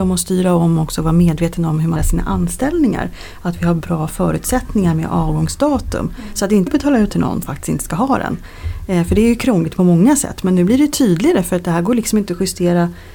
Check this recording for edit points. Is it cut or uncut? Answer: cut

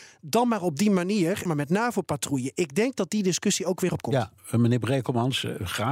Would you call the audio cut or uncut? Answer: cut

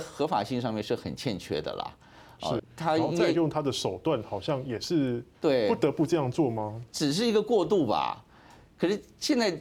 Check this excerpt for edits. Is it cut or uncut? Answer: cut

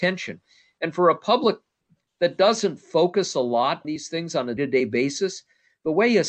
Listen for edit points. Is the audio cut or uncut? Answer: cut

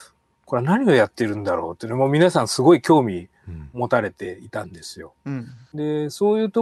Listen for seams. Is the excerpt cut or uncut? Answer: cut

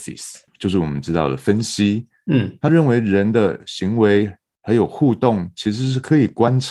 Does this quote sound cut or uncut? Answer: uncut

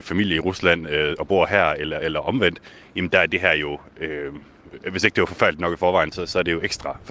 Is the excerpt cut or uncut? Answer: uncut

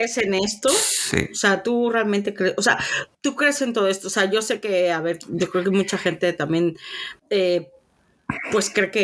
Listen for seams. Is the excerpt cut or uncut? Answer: cut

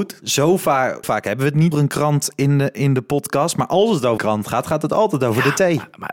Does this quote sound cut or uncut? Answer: cut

